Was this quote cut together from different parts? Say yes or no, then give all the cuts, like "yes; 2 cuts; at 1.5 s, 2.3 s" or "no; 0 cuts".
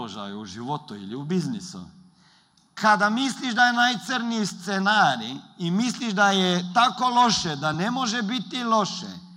no; 0 cuts